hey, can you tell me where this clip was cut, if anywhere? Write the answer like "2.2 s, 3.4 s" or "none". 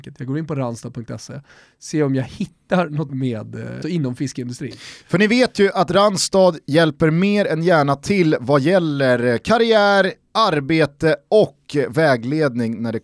3.1 s, 3.8 s